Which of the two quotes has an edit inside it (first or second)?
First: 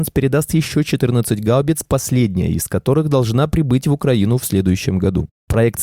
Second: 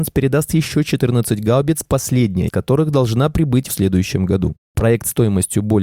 second